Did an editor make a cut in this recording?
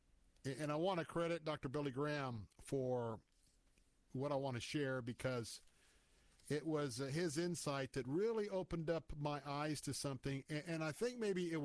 no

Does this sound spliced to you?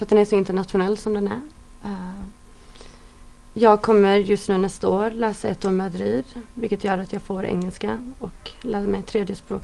no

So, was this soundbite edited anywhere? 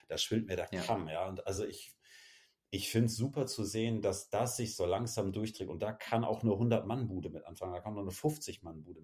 no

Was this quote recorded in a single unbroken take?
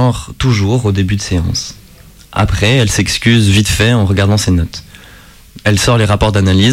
yes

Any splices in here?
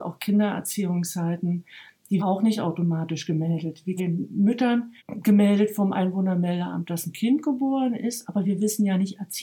yes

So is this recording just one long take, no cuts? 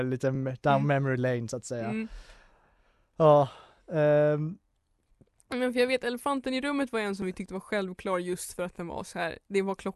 yes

